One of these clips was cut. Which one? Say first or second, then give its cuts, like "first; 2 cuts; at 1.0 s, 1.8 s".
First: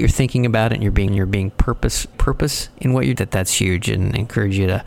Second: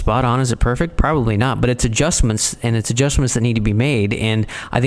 first; 3 cuts; at 1.1 s, 2.1 s, 3.2 s